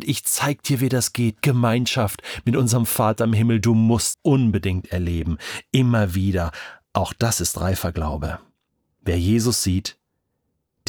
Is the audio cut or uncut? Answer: cut